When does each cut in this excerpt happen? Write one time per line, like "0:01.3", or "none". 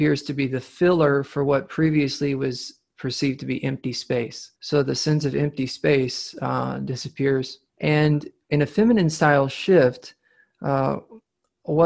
0:04.6
0:07.7

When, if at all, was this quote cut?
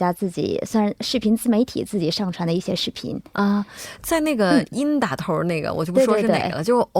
none

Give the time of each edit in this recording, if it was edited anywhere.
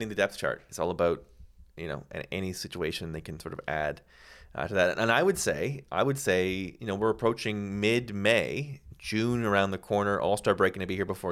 none

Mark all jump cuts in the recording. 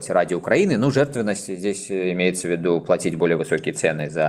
none

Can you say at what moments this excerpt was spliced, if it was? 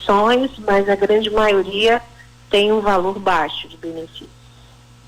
none

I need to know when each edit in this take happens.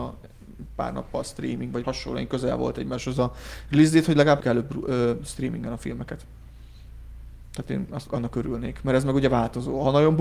0:01.8
0:04.4
0:08.1

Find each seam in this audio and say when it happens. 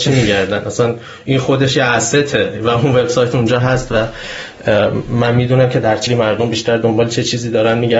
0:06.1

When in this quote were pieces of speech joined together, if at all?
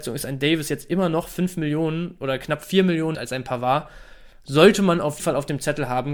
0:03.1
0:05.2

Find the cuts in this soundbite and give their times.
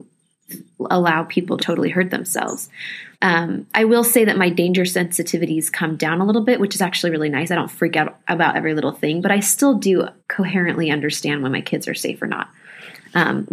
0:01.6
0:03.1
0:10.2

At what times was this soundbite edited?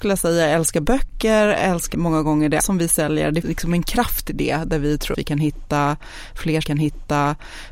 0:01.9
0:02.6
0:03.4
0:05.1
0:06.6

